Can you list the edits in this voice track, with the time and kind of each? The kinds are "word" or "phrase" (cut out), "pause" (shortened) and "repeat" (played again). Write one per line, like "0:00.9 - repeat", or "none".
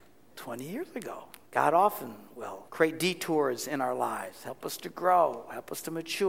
0:01.5 - pause
0:02.7 - pause